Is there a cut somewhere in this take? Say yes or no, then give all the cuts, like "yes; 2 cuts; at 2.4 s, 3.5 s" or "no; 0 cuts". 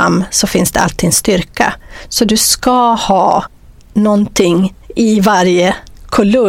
no; 0 cuts